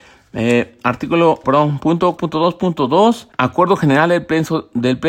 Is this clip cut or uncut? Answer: cut